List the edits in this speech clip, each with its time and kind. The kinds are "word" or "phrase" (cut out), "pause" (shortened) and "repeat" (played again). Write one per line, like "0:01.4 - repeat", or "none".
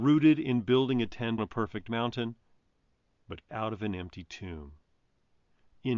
0:01.4 - word
0:03.5 - word